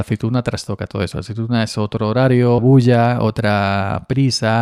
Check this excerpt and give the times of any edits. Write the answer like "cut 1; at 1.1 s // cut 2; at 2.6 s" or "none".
cut 1; at 2.6 s